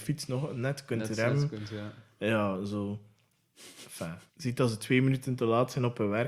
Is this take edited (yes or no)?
yes